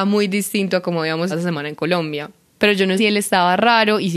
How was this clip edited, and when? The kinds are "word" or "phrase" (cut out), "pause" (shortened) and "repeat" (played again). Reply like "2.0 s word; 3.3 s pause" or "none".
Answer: 1.3 s word; 3.0 s word